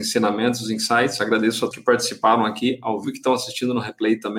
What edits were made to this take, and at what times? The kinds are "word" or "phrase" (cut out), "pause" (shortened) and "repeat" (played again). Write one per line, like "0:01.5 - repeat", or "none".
0:01.7 - word
0:03.0 - word